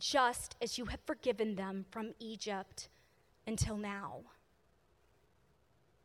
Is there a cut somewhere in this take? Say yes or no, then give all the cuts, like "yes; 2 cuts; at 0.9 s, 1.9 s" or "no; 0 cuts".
no; 0 cuts